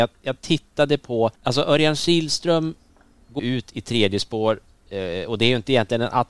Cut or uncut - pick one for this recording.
cut